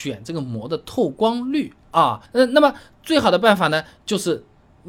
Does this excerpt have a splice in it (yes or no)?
yes